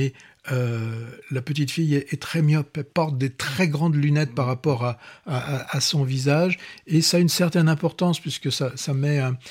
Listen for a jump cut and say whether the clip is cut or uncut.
cut